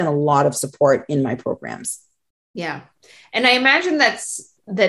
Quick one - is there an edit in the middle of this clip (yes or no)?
no